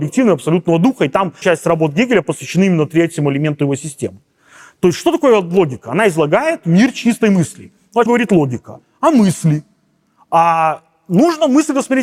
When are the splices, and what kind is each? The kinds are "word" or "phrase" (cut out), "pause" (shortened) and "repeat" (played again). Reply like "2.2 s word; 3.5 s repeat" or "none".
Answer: 1.4 s word; 8.1 s word